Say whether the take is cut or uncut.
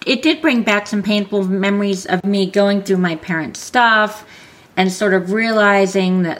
uncut